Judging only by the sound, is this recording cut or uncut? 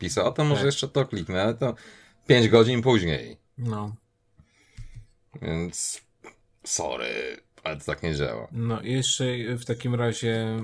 uncut